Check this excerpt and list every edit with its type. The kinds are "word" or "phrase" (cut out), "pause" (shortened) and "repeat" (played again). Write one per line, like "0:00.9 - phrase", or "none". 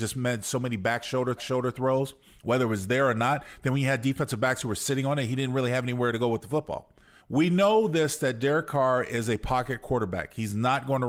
0:01.4 - repeat
0:07.2 - pause